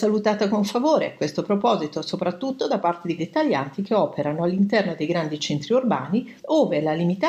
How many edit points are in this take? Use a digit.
2